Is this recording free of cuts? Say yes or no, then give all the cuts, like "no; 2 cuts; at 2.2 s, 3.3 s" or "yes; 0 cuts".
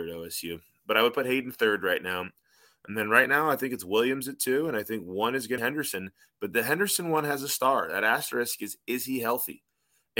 no; 1 cut; at 5.6 s